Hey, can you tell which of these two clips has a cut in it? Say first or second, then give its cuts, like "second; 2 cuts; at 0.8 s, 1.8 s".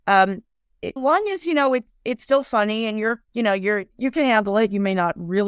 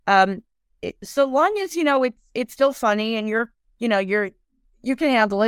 first; 3 cuts; at 1.0 s, 3.3 s, 3.9 s